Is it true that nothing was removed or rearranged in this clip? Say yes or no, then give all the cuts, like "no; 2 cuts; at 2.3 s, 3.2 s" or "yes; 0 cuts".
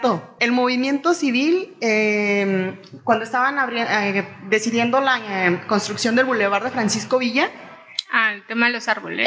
yes; 0 cuts